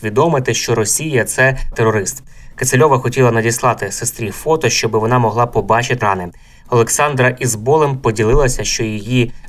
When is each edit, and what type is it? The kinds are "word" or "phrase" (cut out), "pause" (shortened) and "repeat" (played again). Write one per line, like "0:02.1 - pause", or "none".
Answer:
0:01.7 - word
0:06.0 - word

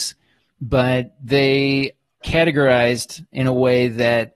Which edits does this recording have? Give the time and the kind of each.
0:02.2 - word

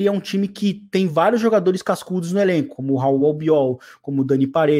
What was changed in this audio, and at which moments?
none

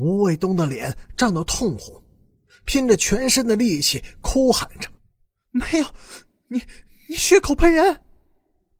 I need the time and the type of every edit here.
0:05.0 - pause

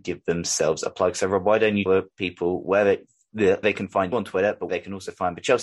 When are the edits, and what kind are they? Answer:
0:01.9 - word
0:03.6 - word
0:04.1 - word
0:04.7 - word

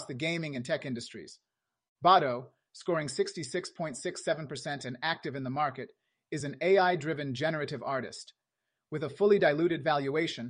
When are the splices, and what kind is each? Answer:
none

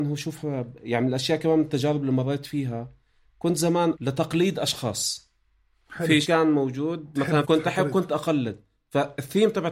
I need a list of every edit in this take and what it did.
0:03.9 - word
0:06.2 - word
0:07.4 - word

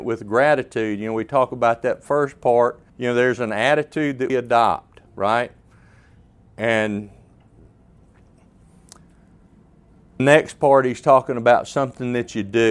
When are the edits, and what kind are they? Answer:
0:02.9 - pause
0:04.3 - word
0:05.1 - pause
0:10.2 - word

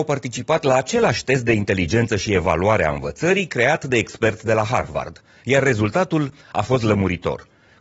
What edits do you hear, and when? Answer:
none

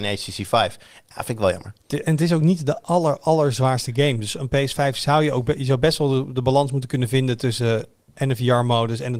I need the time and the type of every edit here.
none

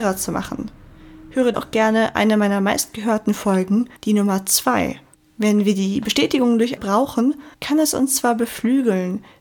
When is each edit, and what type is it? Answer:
0:01.5 - word
0:04.0 - pause
0:05.1 - pause
0:06.8 - word
0:07.5 - pause

